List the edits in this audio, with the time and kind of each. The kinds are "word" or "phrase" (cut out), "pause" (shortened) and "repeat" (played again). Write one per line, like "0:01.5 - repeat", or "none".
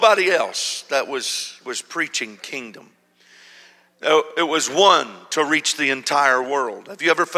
0:01.6 - word
0:02.4 - phrase